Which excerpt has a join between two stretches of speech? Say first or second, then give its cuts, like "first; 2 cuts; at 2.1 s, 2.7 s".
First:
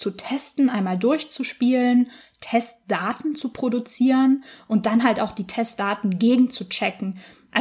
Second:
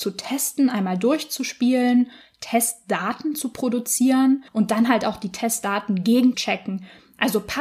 second; 2 cuts; at 4.5 s, 6.3 s